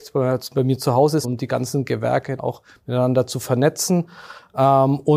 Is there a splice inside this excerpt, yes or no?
yes